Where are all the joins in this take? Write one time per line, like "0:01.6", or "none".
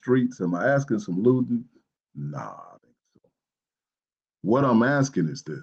0:02.8